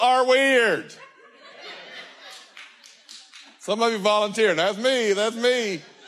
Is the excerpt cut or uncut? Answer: uncut